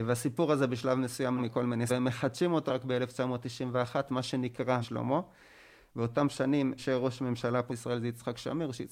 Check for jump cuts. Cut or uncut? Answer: cut